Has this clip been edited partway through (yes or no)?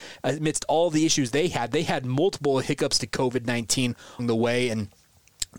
yes